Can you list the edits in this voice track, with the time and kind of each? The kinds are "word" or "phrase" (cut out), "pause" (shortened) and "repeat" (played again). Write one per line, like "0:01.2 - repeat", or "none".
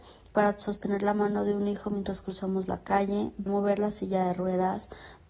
0:03.5 - word